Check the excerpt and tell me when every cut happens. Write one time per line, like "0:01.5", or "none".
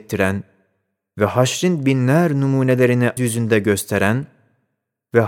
0:03.2